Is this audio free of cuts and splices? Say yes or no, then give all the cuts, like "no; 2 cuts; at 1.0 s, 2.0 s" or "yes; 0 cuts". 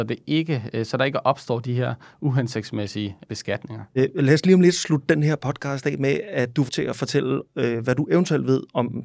no; 2 cuts; at 3.2 s, 6.7 s